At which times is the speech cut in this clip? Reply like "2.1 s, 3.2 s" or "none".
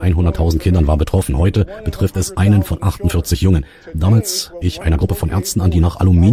4.6 s